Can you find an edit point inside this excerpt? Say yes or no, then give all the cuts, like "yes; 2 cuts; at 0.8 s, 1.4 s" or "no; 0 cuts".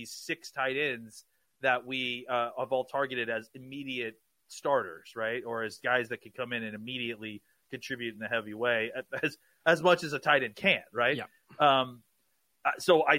no; 0 cuts